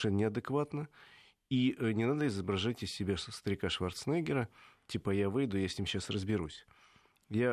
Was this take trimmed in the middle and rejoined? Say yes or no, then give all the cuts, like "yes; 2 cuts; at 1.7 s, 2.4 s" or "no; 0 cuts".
no; 0 cuts